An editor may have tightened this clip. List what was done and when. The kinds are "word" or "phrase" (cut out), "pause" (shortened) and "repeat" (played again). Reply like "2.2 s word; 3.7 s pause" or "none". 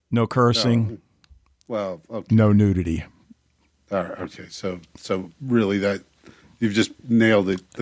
none